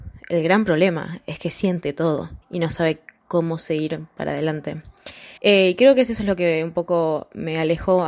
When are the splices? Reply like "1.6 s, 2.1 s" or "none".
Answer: 2.4 s, 5.4 s